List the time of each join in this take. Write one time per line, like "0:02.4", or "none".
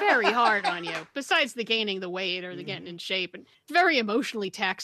0:03.7